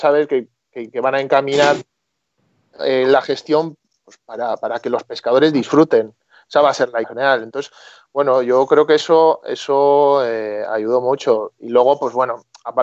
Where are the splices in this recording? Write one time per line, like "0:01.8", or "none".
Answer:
0:07.0